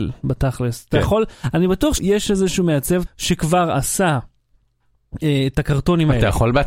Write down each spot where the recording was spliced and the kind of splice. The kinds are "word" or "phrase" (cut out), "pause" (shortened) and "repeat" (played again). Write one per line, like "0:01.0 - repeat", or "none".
0:02.0 - word
0:03.0 - word

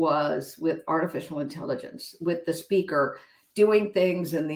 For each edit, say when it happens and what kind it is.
none

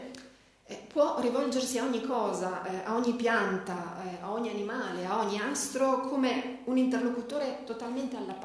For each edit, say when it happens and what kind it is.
none

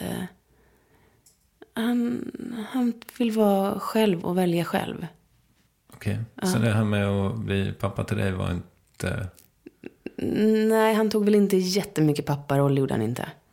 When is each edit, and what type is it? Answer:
none

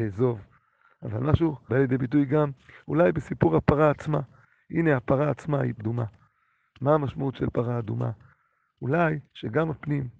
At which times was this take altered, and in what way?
0:01.7 - word
0:05.8 - word
0:09.3 - pause

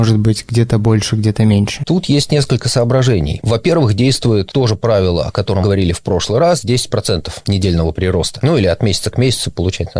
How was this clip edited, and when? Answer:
0:05.6 - word

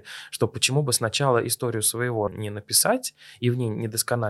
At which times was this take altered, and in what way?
0:02.3 - word

